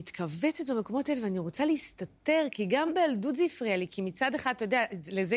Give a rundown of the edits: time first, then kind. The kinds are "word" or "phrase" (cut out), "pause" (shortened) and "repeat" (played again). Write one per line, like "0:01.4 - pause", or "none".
none